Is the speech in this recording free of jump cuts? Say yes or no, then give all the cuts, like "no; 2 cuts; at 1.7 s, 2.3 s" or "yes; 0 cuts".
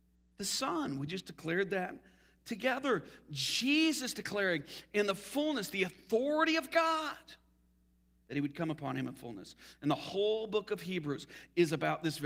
yes; 0 cuts